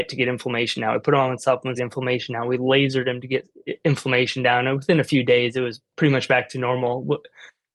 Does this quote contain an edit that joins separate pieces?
yes; 1 cut; at 1.8 s

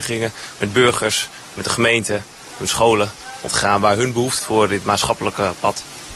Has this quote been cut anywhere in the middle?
yes; 2 cuts; at 3.5 s, 4.4 s

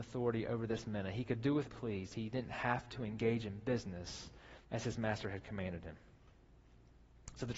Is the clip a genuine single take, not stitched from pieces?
no; 2 cuts; at 1.6 s, 4.6 s

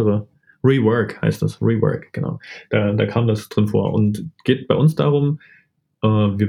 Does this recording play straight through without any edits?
yes; 0 cuts

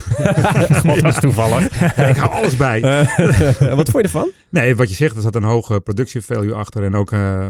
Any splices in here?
no; 0 cuts

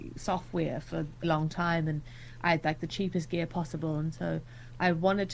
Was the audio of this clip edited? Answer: yes; 1 cut; at 1.2 s

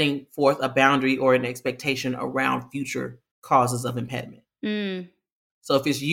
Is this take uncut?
no; 1 cut; at 3.3 s

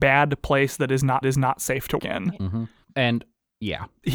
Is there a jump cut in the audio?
yes; 3 cuts; at 1.2 s, 2.0 s, 2.8 s

